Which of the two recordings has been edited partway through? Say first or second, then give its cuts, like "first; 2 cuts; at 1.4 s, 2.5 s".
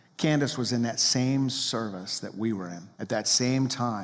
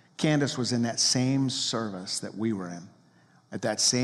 first; 1 cut; at 2.9 s